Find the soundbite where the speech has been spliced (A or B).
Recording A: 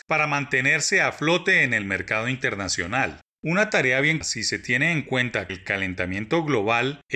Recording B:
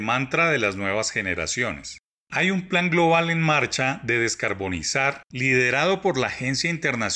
A